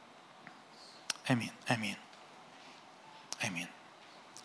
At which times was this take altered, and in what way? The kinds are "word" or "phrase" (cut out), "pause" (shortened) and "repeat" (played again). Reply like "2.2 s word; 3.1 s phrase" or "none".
1.6 s pause